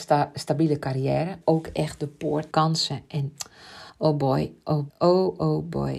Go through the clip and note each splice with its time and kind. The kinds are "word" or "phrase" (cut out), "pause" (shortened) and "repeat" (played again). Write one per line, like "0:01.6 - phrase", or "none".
0:01.4 - phrase
0:02.5 - phrase
0:03.9 - pause
0:04.9 - word